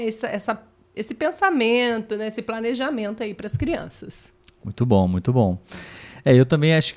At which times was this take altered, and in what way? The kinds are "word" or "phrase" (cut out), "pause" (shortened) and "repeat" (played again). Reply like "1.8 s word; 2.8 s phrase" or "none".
none